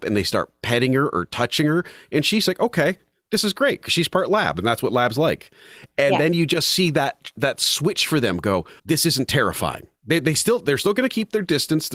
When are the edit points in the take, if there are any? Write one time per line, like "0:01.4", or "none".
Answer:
0:07.4
0:08.8